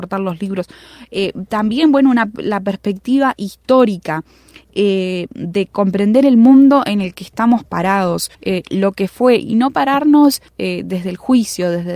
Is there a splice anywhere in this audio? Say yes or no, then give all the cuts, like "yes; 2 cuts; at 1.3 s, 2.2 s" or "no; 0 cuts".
yes; 2 cuts; at 8.3 s, 10.5 s